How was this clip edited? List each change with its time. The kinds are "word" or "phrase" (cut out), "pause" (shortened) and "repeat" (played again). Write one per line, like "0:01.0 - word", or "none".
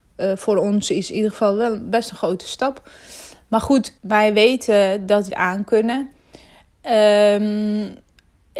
0:04.0 - pause
0:05.3 - word